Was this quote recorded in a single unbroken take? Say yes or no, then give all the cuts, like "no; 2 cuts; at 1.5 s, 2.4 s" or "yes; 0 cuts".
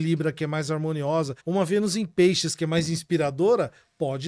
no; 1 cut; at 1.4 s